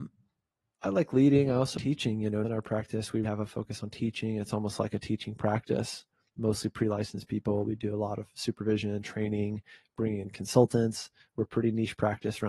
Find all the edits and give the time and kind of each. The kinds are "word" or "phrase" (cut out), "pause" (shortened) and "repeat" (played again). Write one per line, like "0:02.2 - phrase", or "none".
0:01.8 - word
0:02.4 - word
0:03.2 - word